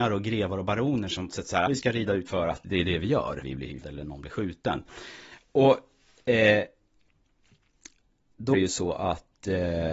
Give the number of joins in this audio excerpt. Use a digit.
7